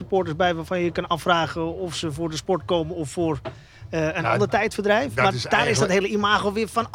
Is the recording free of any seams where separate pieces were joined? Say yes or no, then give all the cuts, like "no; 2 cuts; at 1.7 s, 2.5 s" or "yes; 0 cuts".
yes; 0 cuts